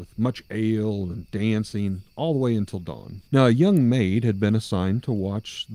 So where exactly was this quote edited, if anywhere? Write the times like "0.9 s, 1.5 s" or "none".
3.3 s

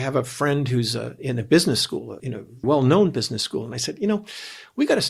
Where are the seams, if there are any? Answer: 1.2 s, 2.2 s, 2.6 s

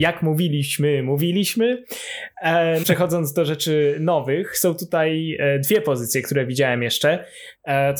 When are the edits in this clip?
2.8 s

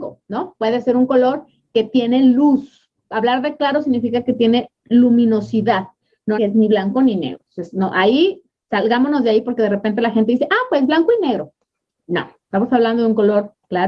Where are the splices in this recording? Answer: 6.3 s

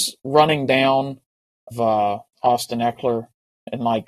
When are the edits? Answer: 1.7 s, 2.3 s

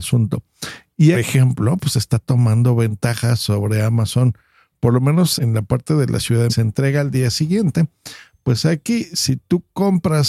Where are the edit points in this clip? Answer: 1.1 s, 5.4 s, 6.5 s

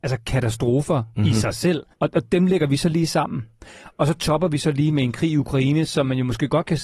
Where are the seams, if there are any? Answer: 1.9 s

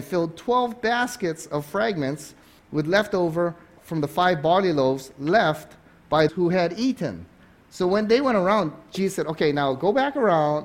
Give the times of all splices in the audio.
6.3 s

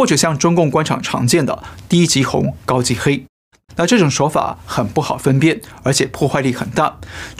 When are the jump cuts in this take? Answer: 3.3 s

